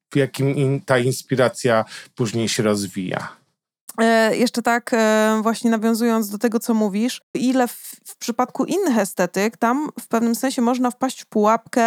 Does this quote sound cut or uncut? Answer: cut